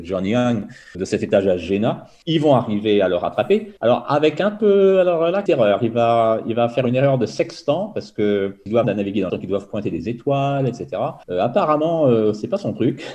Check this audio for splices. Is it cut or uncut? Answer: cut